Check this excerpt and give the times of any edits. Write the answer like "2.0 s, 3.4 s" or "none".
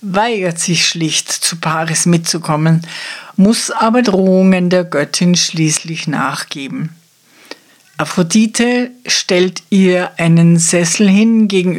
4.0 s